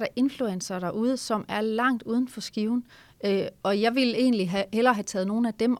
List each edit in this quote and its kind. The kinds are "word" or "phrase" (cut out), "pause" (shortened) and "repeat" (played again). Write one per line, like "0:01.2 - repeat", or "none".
none